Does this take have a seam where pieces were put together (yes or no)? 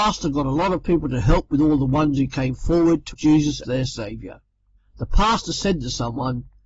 yes